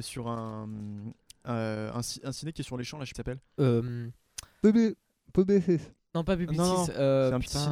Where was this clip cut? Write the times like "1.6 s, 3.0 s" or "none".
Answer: 3.1 s, 6.0 s